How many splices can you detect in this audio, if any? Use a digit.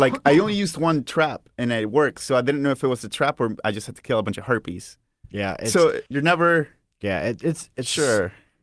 1